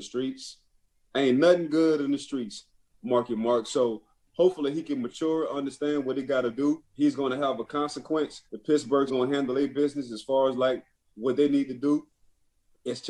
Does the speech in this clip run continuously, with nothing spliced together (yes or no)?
no